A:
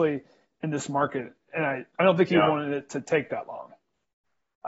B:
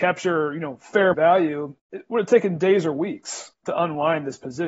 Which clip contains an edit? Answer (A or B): B